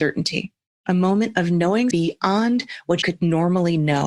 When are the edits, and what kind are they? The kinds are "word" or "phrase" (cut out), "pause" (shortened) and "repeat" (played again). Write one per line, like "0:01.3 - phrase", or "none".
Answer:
0:01.9 - word
0:03.0 - word